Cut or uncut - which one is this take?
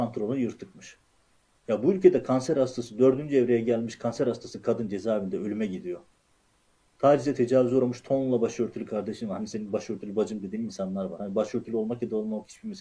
uncut